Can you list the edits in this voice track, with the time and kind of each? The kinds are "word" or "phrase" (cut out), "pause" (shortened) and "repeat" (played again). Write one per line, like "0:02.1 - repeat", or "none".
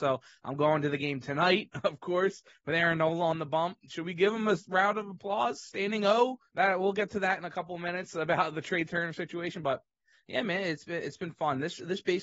0:06.5 - pause
0:09.9 - pause